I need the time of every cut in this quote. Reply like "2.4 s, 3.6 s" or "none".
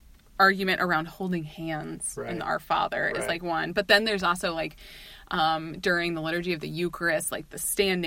none